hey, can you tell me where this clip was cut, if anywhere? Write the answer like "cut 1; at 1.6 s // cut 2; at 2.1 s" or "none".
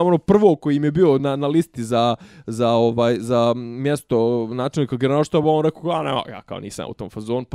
none